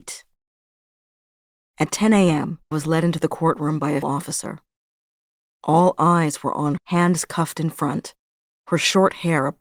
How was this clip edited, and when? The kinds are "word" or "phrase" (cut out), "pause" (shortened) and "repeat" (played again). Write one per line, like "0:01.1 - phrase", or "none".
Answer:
0:02.7 - word
0:04.0 - word
0:06.8 - word